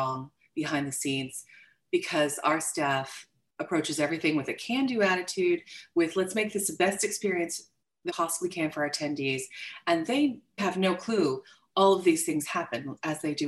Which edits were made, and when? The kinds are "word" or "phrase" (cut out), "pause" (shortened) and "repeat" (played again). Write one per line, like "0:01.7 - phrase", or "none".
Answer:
0:08.1 - word
0:10.6 - word